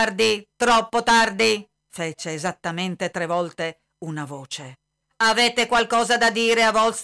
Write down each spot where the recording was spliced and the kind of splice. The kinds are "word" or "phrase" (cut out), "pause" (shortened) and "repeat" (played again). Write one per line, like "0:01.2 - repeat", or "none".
0:05.0 - pause